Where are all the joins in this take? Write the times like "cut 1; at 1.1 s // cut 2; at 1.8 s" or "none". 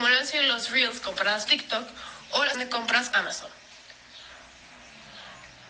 cut 1; at 1.5 s // cut 2; at 2.5 s // cut 3; at 3.1 s

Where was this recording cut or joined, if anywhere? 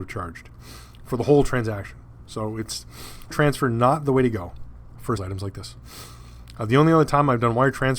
cut 1; at 3.3 s // cut 2; at 5.2 s

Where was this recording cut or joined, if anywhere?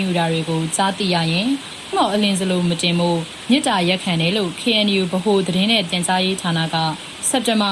cut 1; at 1.9 s

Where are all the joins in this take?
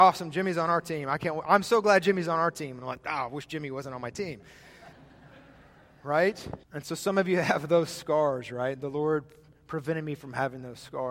cut 1; at 4.9 s // cut 2; at 6.6 s

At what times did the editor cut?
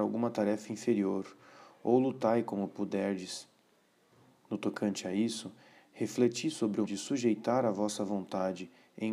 cut 1; at 6.8 s

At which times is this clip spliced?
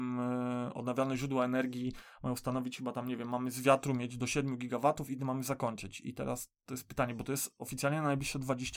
none

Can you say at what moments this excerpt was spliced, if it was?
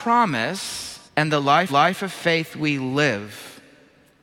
cut 1; at 1.1 s // cut 2; at 1.7 s

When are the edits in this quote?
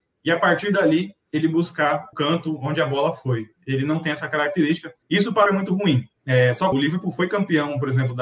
cut 1; at 1.2 s // cut 2; at 2.1 s // cut 3; at 5.0 s // cut 4; at 5.5 s // cut 5; at 6.2 s // cut 6; at 6.7 s

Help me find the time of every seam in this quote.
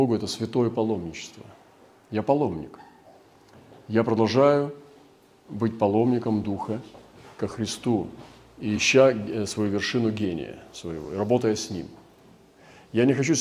none

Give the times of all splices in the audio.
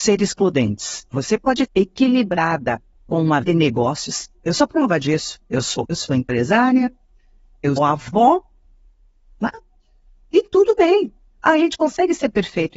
cut 1; at 1.1 s // cut 2; at 1.7 s // cut 3; at 2.9 s // cut 4; at 3.4 s // cut 5; at 4.3 s // cut 6; at 5.8 s // cut 7; at 7.8 s

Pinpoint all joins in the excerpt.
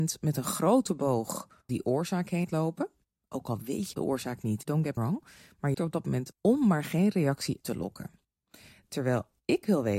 cut 1; at 1.7 s // cut 2; at 2.4 s // cut 3; at 3.9 s // cut 4; at 4.6 s // cut 5; at 5.0 s // cut 6; at 5.7 s // cut 7; at 6.3 s // cut 8; at 7.6 s

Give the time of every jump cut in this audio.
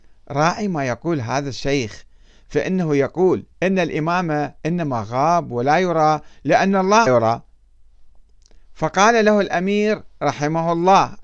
cut 1; at 3.5 s // cut 2; at 4.6 s // cut 3; at 7.1 s

